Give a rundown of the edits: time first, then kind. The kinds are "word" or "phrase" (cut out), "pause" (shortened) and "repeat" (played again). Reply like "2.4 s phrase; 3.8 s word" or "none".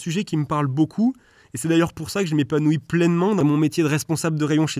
none